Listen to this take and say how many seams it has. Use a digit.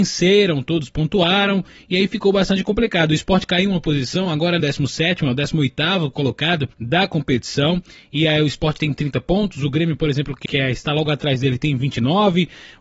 3